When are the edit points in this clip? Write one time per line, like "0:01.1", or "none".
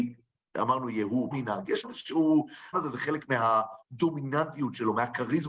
0:01.3
0:01.8
0:02.7